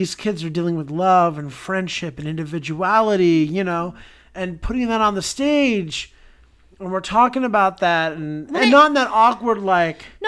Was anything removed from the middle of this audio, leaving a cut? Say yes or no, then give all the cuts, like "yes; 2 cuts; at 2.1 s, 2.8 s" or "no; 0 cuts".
yes; 1 cut; at 8.6 s